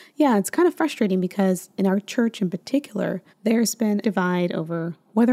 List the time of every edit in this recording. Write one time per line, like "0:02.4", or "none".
0:03.3
0:04.0